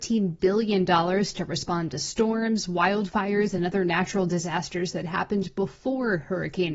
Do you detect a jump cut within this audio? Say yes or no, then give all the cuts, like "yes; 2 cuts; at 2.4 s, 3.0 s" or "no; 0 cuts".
no; 0 cuts